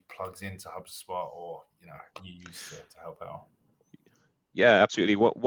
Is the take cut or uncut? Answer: cut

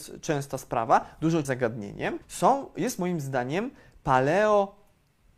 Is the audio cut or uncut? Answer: cut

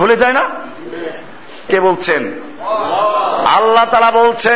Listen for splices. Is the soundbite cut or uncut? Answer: cut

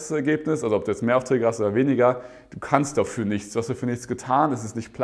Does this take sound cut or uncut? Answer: uncut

